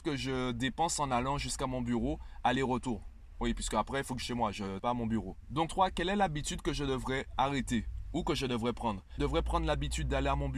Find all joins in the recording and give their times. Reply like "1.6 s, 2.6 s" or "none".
4.2 s, 4.8 s, 5.7 s, 9.2 s